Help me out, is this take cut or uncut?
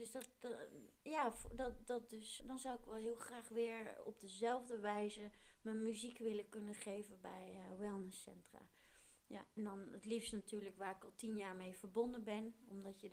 cut